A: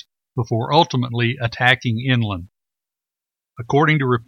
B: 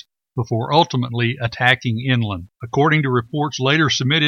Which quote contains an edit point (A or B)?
B